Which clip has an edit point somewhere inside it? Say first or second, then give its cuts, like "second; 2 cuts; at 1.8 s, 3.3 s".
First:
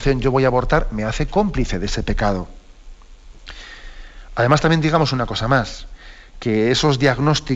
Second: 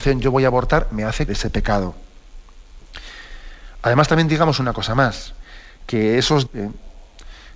second; 2 cuts; at 1.3 s, 6.5 s